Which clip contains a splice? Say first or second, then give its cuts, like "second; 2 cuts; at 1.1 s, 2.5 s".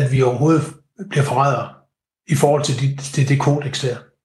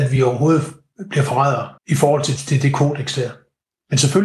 second; 2 cuts; at 1.8 s, 2.4 s